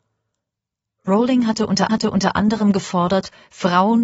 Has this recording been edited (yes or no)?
yes